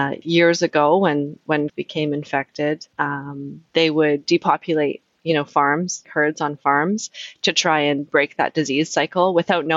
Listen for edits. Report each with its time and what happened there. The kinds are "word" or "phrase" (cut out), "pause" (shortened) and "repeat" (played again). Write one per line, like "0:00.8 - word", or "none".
0:01.7 - phrase
0:02.9 - pause
0:06.0 - word